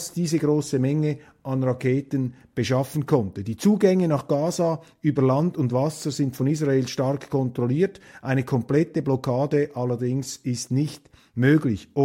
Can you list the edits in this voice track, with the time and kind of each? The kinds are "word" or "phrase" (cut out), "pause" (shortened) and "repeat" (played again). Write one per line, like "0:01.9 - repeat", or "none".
none